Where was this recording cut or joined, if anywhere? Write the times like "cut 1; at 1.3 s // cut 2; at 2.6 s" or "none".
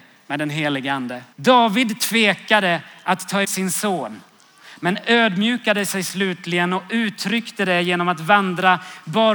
cut 1; at 1.3 s // cut 2; at 3.4 s

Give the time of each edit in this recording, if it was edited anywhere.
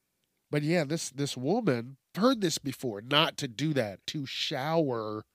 cut 1; at 2.1 s // cut 2; at 4.0 s

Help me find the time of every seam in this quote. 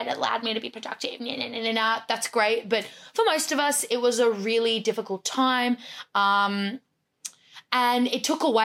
none

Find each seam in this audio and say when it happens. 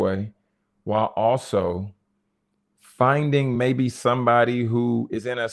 none

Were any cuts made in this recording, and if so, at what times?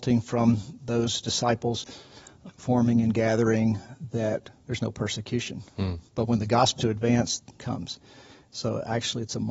cut 1; at 2.5 s // cut 2; at 4.6 s // cut 3; at 6.1 s // cut 4; at 6.8 s // cut 5; at 7.6 s

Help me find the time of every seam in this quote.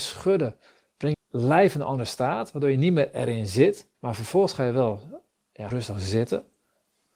cut 1; at 1.1 s // cut 2; at 3.9 s // cut 3; at 5.7 s

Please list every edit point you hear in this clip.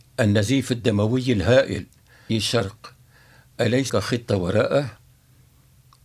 cut 1; at 2.3 s // cut 2; at 3.9 s

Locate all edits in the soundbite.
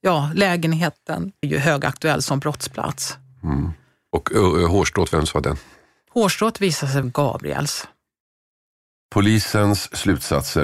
cut 1; at 1.4 s // cut 2; at 7.0 s

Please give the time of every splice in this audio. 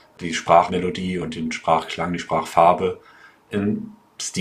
none

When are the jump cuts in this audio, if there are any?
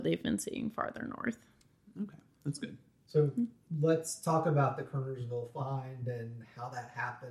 none

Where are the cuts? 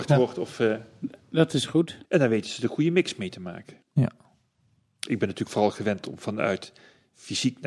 cut 1; at 2.0 s // cut 2; at 3.8 s

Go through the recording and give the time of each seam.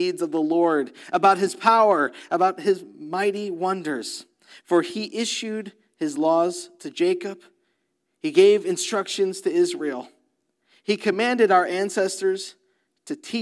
none

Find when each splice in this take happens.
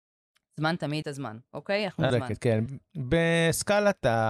cut 1; at 1.0 s // cut 2; at 2.1 s // cut 3; at 2.7 s

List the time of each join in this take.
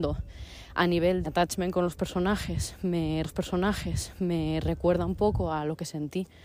cut 1; at 1.2 s // cut 2; at 3.2 s

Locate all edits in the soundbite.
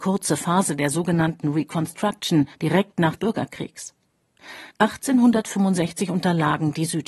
cut 1; at 2.5 s // cut 2; at 3.2 s // cut 3; at 4.7 s

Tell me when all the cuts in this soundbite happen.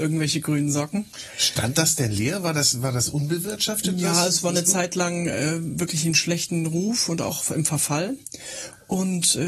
none

